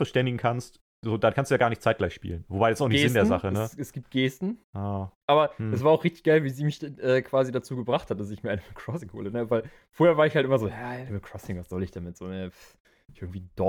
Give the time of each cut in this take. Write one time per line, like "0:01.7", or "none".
0:04.6
0:05.2